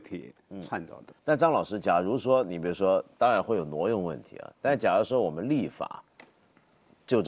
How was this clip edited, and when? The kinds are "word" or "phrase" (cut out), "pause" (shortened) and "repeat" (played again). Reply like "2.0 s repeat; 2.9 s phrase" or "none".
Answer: 1.2 s pause